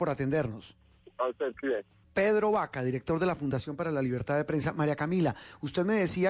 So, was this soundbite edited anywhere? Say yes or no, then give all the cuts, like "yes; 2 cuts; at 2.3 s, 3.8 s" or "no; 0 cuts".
yes; 1 cut; at 1.6 s